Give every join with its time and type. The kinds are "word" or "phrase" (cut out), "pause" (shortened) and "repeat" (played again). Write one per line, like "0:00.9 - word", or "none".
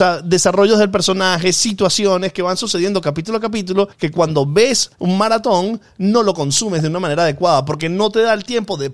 0:03.9 - pause
0:04.9 - pause